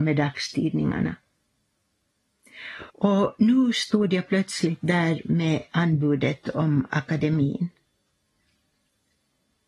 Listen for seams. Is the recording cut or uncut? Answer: cut